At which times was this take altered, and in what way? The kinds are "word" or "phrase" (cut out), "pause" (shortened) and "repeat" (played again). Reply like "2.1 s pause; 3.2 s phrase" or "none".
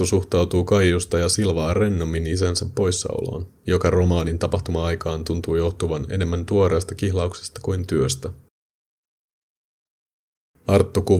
3.6 s pause